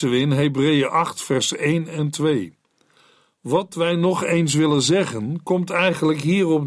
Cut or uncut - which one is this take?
uncut